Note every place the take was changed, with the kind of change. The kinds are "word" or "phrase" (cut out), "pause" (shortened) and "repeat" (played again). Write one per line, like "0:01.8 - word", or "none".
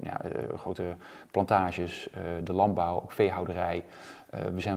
0:02.4 - word